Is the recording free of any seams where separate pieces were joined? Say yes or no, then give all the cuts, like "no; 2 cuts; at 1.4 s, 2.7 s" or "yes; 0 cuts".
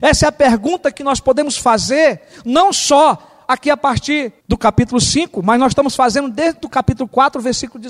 no; 1 cut; at 4.4 s